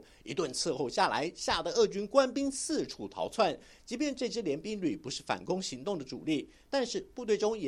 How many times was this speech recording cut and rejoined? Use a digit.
0